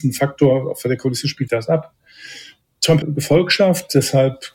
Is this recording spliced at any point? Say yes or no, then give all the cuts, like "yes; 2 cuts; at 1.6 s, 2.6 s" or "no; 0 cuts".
yes; 2 cuts; at 1.5 s, 3.0 s